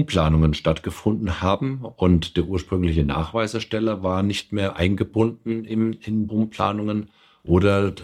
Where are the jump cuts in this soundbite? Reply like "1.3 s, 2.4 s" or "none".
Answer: 6.3 s